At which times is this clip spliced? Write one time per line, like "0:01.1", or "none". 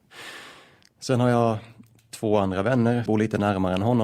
0:03.1